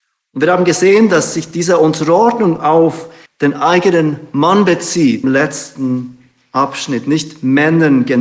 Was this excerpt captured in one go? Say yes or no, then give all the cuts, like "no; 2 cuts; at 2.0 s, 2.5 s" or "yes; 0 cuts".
no; 2 cuts; at 3.3 s, 5.2 s